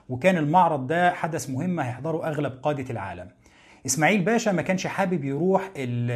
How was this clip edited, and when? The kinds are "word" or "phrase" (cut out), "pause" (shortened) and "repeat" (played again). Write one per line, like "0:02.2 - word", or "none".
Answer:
none